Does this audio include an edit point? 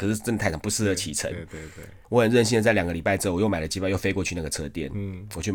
yes; 1 cut; at 2.0 s

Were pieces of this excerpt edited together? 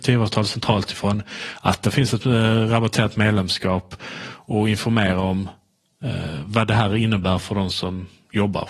no; 0 cuts

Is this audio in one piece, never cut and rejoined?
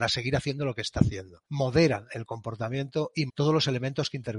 no; 2 cuts; at 1.4 s, 3.3 s

